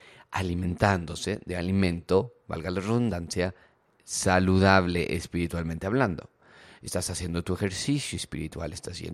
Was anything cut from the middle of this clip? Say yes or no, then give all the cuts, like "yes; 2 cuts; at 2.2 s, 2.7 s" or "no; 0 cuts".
no; 0 cuts